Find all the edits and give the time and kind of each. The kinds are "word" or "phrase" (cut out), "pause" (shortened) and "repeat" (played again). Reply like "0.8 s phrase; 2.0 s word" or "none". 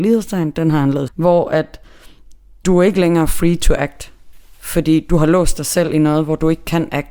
1.1 s word